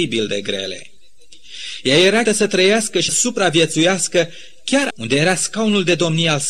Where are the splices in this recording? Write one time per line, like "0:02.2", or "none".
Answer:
0:02.3
0:03.1
0:04.9